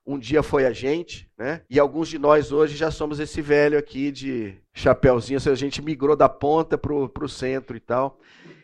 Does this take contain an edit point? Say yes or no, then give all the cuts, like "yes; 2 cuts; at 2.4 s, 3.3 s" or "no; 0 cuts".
yes; 2 cuts; at 1.6 s, 4.6 s